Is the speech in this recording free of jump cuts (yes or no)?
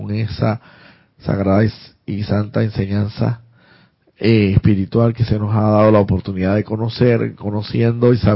yes